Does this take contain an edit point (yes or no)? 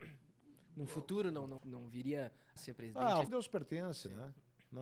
yes